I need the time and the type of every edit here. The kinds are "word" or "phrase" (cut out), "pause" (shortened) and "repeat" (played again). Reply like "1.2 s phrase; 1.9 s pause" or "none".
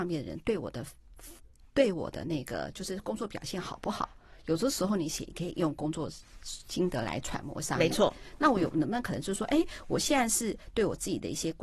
none